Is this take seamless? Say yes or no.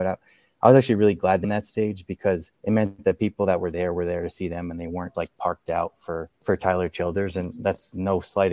no